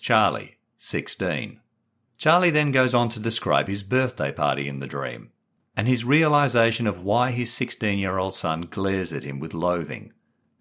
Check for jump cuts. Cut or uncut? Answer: uncut